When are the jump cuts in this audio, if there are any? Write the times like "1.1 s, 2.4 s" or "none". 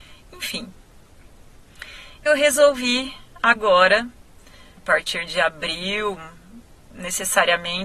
2.3 s, 4.8 s